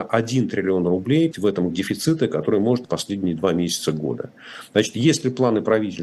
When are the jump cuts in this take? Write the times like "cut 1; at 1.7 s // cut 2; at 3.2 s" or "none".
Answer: cut 1; at 1.3 s // cut 2; at 1.7 s // cut 3; at 2.8 s